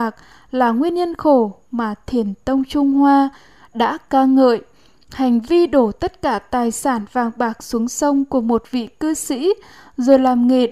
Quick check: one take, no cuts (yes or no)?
yes